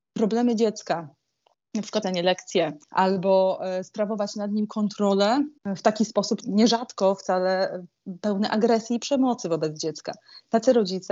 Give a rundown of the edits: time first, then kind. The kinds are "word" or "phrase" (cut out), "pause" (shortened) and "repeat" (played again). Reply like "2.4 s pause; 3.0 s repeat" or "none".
2.0 s word; 2.8 s pause; 5.6 s pause; 6.4 s word